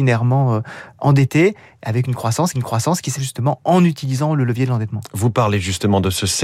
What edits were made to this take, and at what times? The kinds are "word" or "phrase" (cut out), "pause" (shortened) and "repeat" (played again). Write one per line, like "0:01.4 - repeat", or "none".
0:02.5 - repeat
0:03.2 - phrase

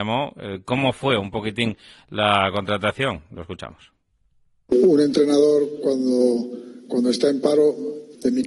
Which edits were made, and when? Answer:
none

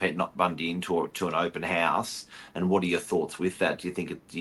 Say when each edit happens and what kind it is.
none

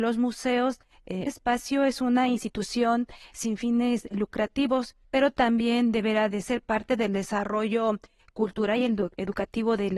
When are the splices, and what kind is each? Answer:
0:01.3 - phrase
0:05.0 - pause
0:06.3 - word

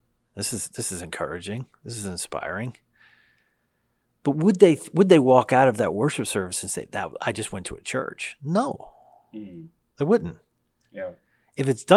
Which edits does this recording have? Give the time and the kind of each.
none

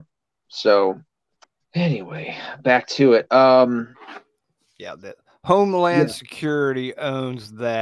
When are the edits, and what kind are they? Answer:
0:01.4 - pause

